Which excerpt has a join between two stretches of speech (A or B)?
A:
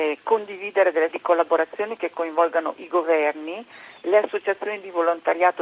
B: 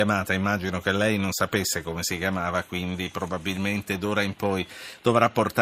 A